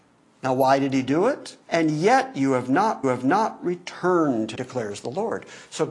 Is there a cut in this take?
yes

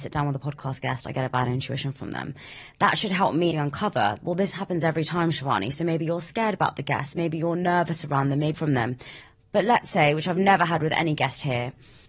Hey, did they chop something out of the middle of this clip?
yes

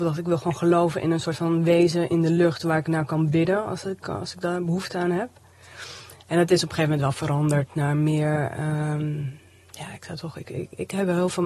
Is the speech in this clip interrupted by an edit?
no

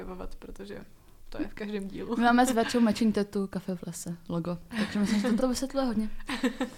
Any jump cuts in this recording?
yes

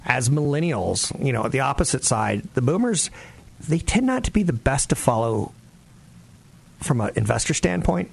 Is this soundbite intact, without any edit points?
yes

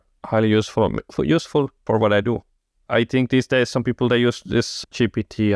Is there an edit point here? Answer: no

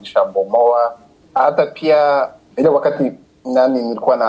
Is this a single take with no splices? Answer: yes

